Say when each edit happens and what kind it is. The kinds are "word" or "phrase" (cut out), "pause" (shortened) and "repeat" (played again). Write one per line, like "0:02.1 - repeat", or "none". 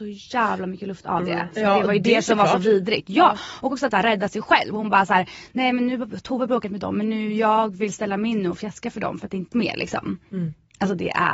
0:03.9 - phrase
0:09.5 - phrase

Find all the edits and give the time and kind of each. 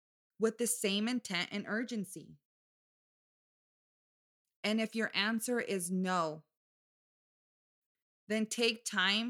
none

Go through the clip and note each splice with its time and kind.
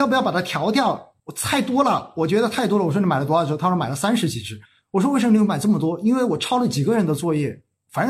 0:01.2 - pause
0:04.6 - pause

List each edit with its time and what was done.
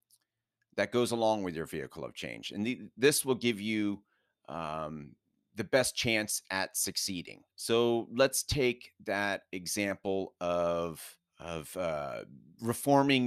0:05.2 - pause
0:07.5 - pause
0:11.3 - pause

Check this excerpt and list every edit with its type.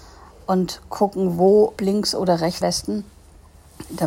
0:01.8 - word
0:02.6 - word

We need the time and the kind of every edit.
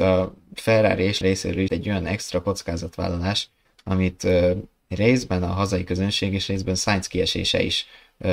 0:01.2 - word
0:01.7 - phrase

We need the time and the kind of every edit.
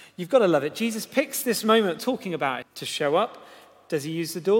0:02.0 - phrase
0:02.6 - word

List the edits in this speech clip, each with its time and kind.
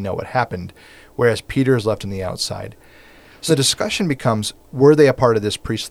0:03.5 - word

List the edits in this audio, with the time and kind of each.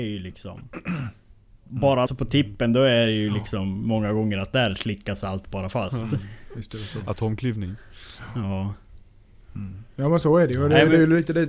0:02.1 - phrase

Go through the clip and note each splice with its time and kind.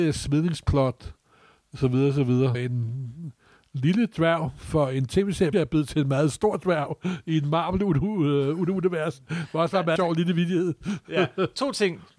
0:02.5 - word
0:05.5 - word
0:10.0 - word

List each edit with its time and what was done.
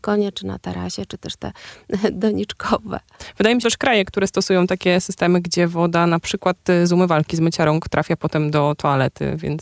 0:03.6 - phrase

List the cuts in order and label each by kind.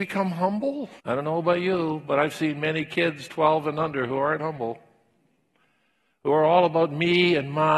0:01.0 - pause
0:04.4 - word

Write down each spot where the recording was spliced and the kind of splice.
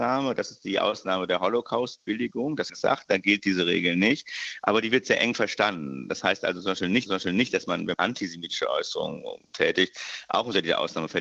0:02.7 - phrase
0:07.1 - repeat
0:07.9 - word
0:09.4 - pause

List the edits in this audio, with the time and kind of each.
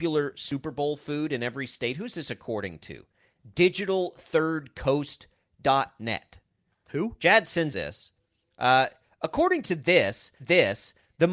0:07.7 - word
0:10.4 - repeat

